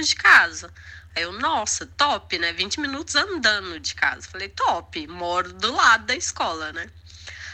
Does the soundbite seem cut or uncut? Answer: uncut